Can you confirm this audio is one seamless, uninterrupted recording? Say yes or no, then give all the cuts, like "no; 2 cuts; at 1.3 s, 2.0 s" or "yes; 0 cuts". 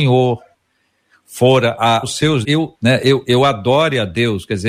no; 3 cuts; at 2.0 s, 2.4 s, 2.7 s